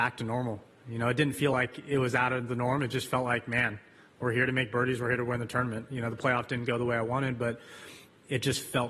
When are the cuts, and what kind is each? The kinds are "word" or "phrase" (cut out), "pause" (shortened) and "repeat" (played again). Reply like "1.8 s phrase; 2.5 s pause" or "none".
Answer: none